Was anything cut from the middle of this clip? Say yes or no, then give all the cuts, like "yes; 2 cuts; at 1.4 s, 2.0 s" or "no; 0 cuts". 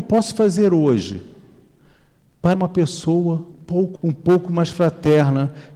yes; 3 cuts; at 2.5 s, 3.5 s, 3.9 s